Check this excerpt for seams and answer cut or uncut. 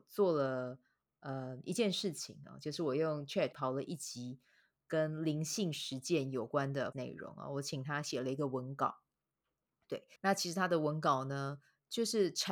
cut